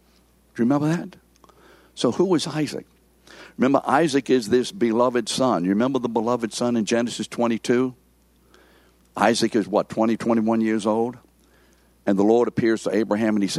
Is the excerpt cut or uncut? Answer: uncut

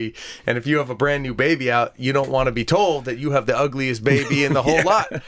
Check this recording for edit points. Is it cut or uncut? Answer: uncut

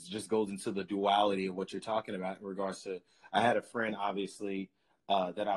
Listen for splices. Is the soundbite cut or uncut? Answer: uncut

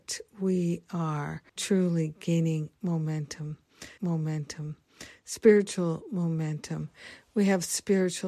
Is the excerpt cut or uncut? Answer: cut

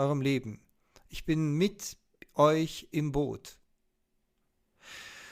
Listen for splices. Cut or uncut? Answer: uncut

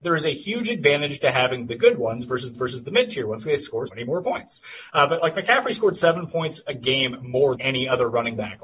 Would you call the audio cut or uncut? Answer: cut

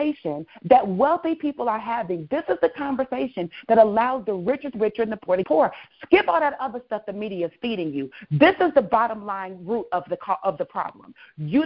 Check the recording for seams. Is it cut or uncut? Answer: cut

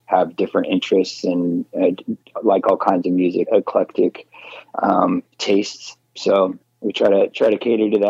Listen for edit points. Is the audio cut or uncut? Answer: cut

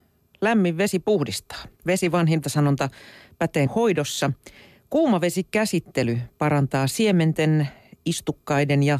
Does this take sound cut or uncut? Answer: cut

